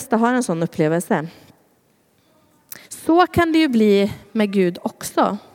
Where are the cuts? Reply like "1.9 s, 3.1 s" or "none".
2.8 s